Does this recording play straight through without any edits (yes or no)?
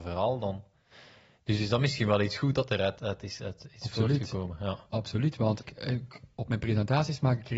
no